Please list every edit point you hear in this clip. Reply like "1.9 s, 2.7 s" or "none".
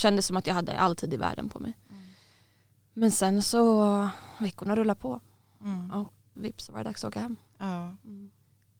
6.3 s